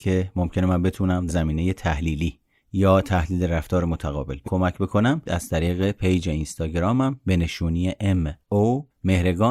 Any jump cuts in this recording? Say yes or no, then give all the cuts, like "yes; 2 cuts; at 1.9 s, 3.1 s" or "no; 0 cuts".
yes; 3 cuts; at 1.3 s, 4.4 s, 5.3 s